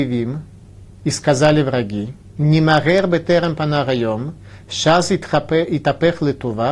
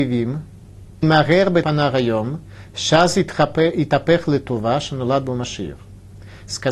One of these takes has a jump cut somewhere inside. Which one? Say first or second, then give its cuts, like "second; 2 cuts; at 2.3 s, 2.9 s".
second; 2 cuts; at 1.0 s, 1.6 s